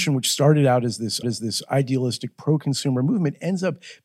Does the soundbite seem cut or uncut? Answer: cut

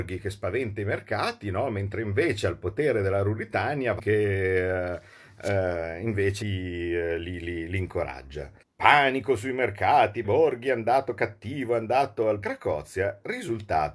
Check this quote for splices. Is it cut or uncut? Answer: cut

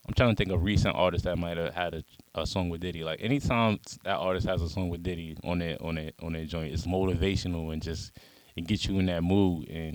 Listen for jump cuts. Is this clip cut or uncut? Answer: cut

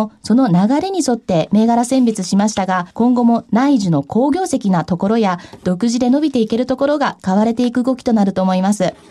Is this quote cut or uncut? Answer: cut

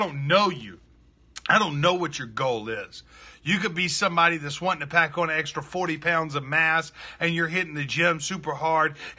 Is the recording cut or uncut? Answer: uncut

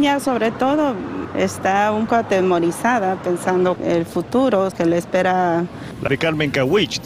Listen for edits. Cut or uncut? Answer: cut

